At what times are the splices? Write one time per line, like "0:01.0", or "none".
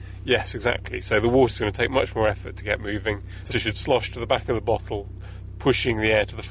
0:03.5